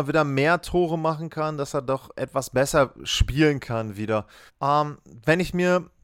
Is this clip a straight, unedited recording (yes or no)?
no